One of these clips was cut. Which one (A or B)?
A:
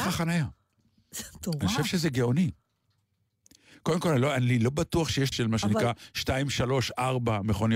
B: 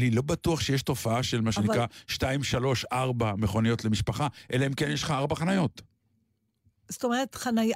A